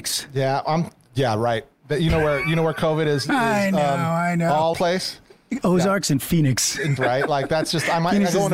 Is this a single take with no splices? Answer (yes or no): no